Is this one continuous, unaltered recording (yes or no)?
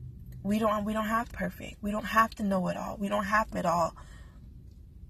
no